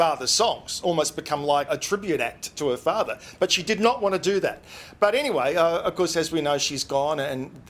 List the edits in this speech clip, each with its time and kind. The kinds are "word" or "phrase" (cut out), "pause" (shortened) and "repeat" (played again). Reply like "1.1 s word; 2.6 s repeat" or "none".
1.7 s word